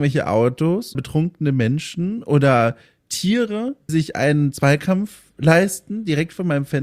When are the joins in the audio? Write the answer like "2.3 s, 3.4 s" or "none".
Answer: 0.9 s, 3.9 s